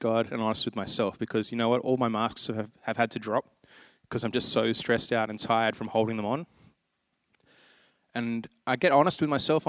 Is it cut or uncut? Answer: uncut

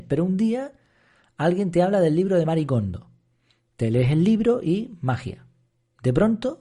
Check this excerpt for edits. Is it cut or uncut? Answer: uncut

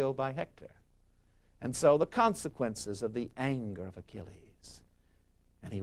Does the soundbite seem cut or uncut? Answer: uncut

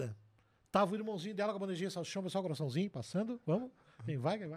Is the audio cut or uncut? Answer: uncut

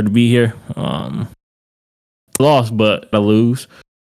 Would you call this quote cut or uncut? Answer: cut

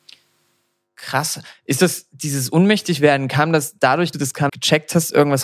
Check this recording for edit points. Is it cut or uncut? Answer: cut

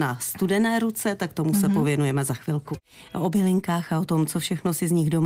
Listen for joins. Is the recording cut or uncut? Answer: uncut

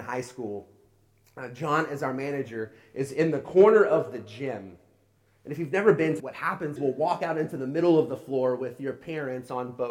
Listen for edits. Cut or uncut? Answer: cut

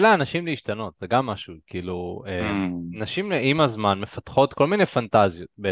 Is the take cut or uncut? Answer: uncut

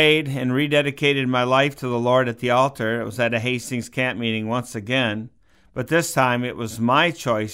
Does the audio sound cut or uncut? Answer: uncut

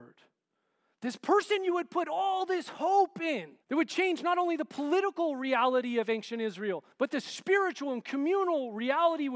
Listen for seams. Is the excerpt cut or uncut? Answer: cut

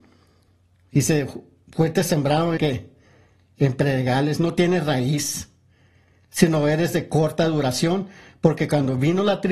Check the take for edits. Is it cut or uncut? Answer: cut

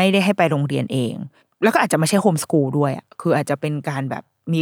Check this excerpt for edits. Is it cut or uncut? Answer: cut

